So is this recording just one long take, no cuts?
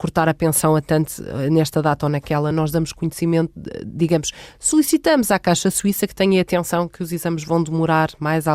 yes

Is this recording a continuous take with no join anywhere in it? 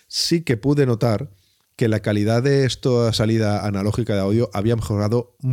yes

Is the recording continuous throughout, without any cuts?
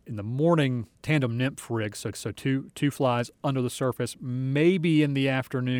no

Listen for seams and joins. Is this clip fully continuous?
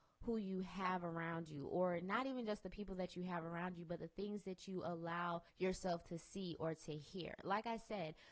no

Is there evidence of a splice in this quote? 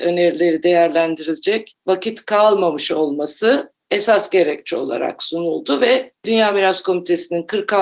no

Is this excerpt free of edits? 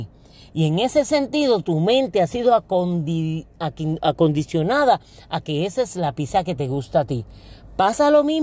yes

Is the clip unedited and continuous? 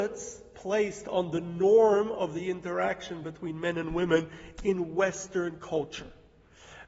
yes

